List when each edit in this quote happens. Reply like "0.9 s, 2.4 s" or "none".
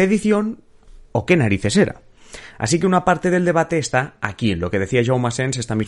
1.1 s